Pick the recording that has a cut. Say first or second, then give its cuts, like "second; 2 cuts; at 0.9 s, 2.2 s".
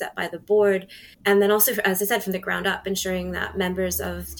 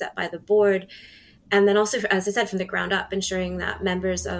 first; 1 cut; at 1.1 s